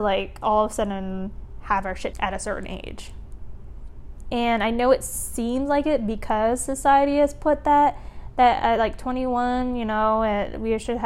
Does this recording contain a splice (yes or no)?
yes